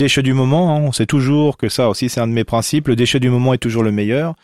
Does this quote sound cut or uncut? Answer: uncut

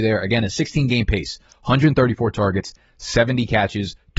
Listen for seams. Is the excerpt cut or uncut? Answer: uncut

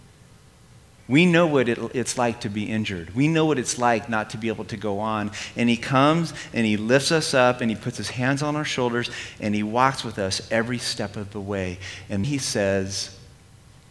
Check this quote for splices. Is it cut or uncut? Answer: cut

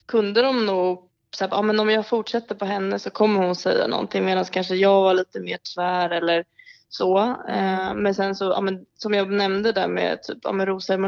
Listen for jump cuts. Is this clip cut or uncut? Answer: uncut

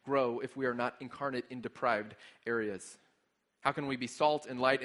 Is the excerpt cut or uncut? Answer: uncut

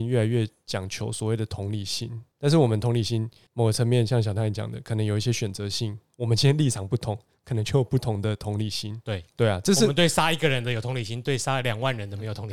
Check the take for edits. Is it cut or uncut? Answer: uncut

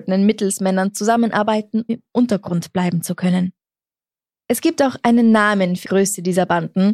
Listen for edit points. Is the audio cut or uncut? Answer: cut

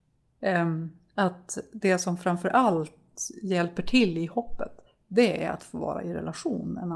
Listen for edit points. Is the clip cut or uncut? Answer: uncut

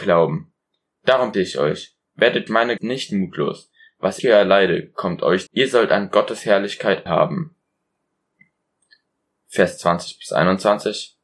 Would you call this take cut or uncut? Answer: cut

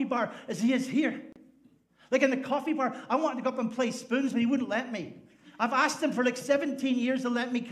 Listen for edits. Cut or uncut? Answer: uncut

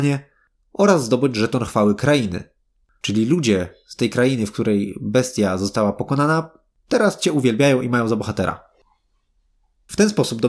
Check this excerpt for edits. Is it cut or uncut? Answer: uncut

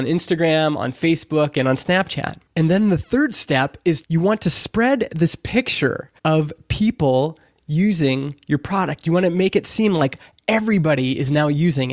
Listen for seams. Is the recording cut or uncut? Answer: cut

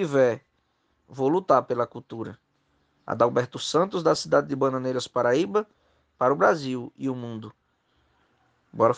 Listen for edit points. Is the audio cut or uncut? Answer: uncut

